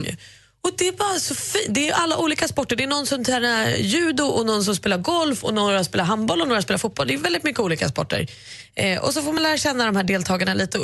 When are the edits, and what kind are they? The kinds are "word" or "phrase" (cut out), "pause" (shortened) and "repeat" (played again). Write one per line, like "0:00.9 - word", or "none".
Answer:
none